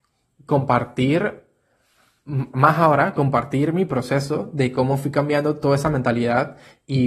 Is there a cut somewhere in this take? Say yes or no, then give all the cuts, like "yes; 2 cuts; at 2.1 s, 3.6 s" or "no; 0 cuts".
no; 0 cuts